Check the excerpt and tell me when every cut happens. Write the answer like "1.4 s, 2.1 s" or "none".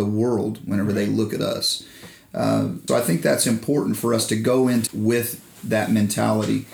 2.9 s, 4.9 s